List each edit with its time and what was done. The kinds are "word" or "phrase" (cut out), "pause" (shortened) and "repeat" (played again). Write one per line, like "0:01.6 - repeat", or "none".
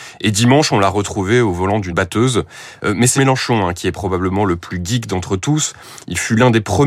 0:01.9 - word
0:03.2 - word